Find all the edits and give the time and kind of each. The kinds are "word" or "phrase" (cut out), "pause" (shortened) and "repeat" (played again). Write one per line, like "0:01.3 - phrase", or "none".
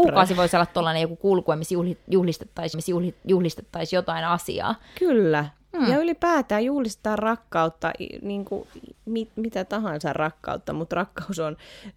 0:02.7 - repeat
0:08.9 - pause